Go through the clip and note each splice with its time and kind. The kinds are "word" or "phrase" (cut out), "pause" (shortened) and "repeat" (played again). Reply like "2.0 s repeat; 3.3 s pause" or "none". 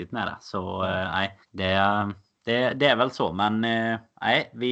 1.4 s pause